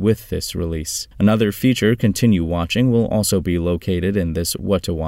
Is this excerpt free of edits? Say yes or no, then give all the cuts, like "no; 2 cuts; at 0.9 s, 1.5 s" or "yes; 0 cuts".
no; 1 cut; at 1.1 s